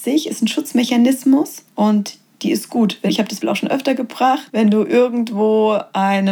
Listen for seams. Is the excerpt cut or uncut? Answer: cut